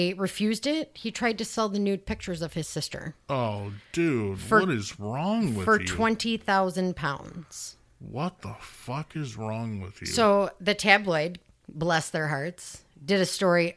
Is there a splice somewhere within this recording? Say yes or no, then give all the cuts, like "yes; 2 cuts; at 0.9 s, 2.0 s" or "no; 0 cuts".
yes; 1 cut; at 3.2 s